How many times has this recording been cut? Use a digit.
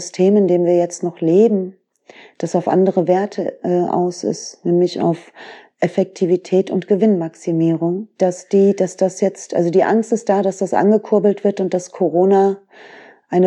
0